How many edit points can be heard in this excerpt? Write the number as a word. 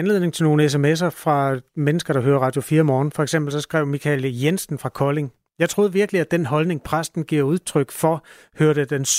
zero